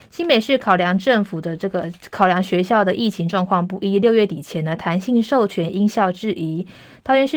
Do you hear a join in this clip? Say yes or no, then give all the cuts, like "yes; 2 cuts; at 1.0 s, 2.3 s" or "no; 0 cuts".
no; 0 cuts